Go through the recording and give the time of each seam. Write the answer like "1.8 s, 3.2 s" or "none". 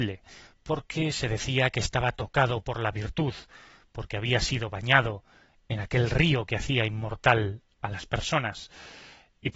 none